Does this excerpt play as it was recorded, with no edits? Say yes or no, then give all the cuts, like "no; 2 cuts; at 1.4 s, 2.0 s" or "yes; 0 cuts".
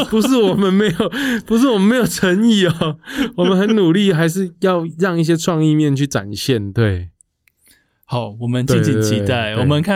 yes; 0 cuts